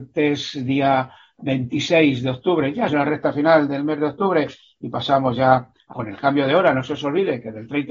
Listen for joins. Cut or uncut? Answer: cut